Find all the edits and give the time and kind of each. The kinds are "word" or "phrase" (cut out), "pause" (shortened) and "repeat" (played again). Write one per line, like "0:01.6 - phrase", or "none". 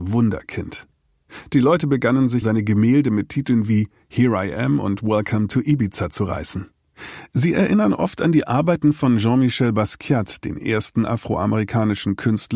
0:02.4 - word